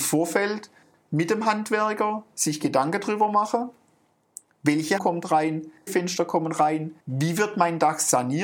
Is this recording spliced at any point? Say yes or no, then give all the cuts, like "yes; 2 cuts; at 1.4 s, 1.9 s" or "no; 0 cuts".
yes; 3 cuts; at 5.0 s, 5.9 s, 7.0 s